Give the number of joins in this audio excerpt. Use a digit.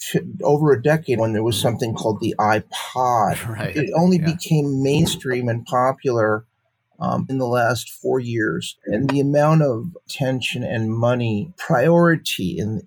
3